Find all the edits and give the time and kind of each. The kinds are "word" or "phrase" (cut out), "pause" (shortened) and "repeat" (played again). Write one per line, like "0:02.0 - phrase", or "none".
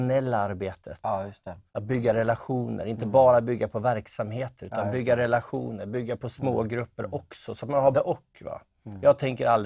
0:01.7 - pause
0:07.9 - word